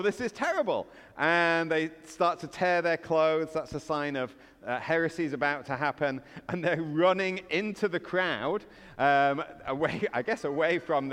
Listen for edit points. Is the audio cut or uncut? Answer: uncut